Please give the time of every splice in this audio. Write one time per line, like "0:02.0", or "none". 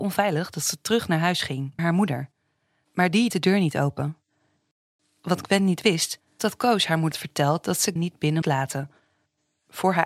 0:01.8
0:03.3
0:06.4
0:07.1
0:08.0
0:08.4